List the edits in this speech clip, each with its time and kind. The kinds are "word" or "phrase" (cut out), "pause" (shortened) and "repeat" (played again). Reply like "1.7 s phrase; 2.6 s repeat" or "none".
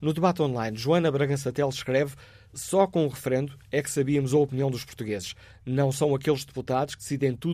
none